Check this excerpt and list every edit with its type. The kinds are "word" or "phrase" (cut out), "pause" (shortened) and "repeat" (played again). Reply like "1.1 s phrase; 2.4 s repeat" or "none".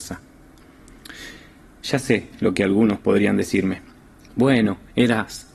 none